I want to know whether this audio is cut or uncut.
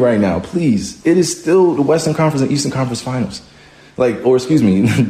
uncut